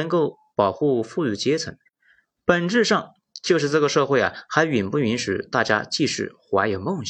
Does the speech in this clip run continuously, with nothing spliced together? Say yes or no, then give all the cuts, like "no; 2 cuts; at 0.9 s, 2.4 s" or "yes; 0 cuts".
yes; 0 cuts